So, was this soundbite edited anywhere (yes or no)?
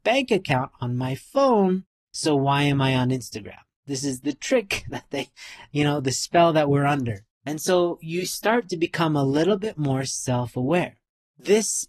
yes